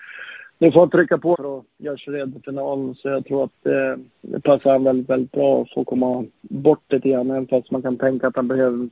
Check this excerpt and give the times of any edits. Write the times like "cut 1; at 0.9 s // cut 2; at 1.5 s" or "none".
cut 1; at 1.3 s // cut 2; at 4.1 s